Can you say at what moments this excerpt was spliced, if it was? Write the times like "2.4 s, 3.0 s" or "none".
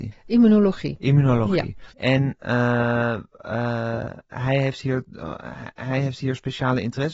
1.9 s